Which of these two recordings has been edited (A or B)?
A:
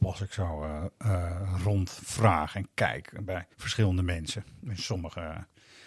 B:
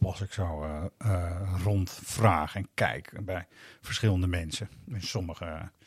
A